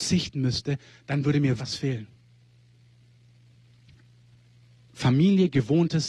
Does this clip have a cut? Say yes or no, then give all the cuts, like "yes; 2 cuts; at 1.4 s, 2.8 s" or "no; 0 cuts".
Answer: yes; 1 cut; at 1.6 s